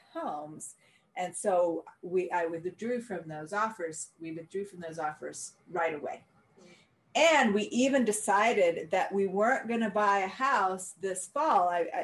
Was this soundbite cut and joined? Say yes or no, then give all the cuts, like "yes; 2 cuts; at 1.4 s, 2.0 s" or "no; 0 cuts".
no; 0 cuts